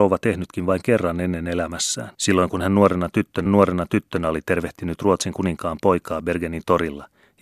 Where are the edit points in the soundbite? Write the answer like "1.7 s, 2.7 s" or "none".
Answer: 2.1 s, 3.5 s